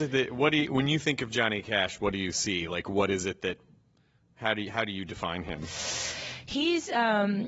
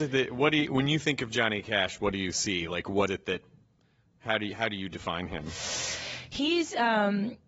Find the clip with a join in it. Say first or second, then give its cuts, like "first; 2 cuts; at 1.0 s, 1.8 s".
second; 1 cut; at 3.1 s